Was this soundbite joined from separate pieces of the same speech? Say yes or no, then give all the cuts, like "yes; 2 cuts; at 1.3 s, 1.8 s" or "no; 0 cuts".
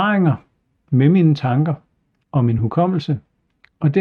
no; 0 cuts